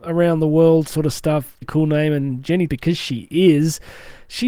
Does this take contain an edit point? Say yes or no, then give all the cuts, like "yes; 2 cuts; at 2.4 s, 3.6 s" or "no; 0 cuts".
yes; 2 cuts; at 1.6 s, 2.7 s